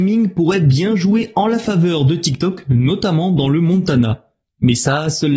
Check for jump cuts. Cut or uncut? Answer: uncut